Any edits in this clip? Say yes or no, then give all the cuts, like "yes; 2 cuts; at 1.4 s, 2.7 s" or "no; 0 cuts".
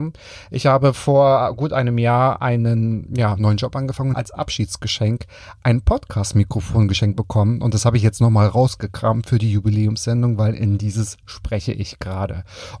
yes; 1 cut; at 4.1 s